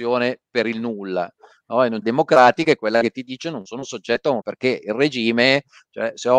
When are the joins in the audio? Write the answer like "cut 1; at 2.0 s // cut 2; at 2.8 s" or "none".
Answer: cut 1; at 2.0 s // cut 2; at 4.4 s